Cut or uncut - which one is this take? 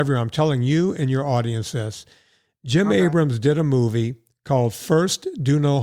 uncut